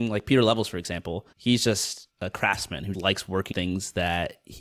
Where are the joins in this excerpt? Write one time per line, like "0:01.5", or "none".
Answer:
0:01.3
0:02.1
0:02.9
0:03.5